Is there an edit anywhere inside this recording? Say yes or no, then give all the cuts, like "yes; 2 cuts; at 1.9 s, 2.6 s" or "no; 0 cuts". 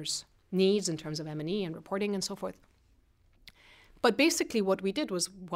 no; 0 cuts